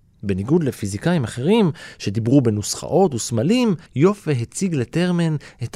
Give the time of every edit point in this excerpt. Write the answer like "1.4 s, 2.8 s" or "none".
3.9 s